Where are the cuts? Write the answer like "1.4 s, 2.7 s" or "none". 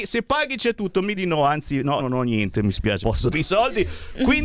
1.1 s, 2.0 s, 3.0 s, 3.3 s